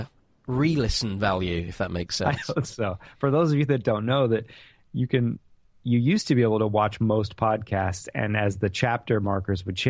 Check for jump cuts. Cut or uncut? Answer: uncut